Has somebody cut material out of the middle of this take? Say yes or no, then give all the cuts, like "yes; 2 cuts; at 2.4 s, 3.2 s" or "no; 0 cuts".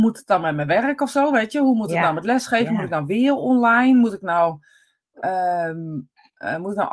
no; 0 cuts